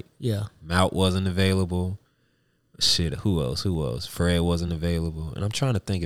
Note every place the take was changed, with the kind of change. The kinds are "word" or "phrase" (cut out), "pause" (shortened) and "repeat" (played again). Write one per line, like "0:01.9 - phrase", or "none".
none